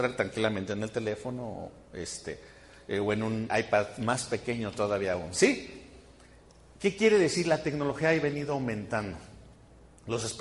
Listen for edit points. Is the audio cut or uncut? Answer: cut